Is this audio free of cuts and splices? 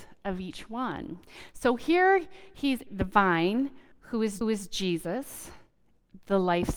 no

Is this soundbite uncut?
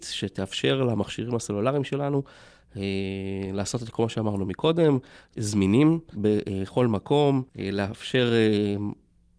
no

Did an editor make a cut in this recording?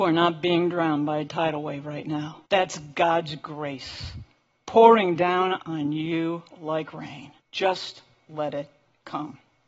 yes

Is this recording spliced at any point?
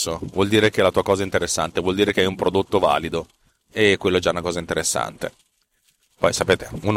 no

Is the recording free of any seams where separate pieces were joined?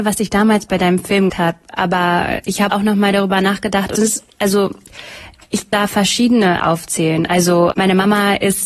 no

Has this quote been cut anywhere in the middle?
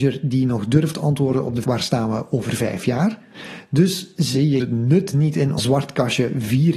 yes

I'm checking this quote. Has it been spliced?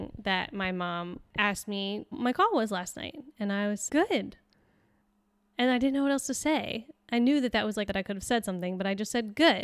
yes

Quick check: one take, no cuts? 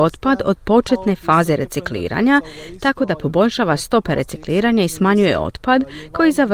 yes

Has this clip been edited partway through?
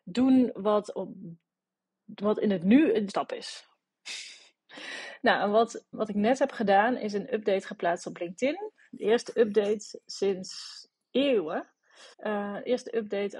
yes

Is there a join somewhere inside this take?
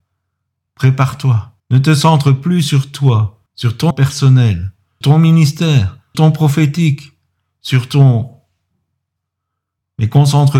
yes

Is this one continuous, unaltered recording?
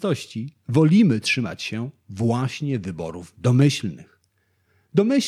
yes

